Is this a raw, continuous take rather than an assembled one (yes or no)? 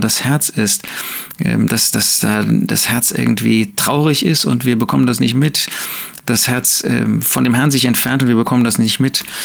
yes